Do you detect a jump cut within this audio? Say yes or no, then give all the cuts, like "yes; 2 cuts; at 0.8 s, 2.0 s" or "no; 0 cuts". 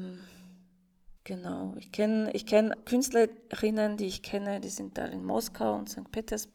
yes; 2 cuts; at 1.2 s, 2.7 s